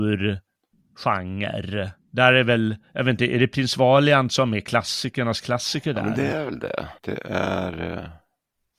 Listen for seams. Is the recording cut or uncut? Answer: cut